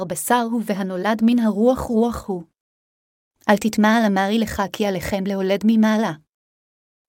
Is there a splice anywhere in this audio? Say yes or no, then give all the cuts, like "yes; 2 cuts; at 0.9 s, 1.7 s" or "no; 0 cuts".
no; 0 cuts